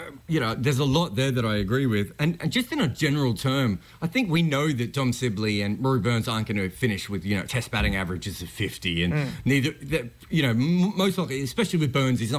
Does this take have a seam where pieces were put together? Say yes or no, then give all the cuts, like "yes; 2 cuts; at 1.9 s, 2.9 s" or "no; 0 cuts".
no; 0 cuts